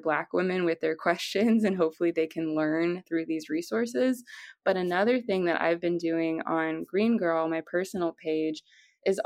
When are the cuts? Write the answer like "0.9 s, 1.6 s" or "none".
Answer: none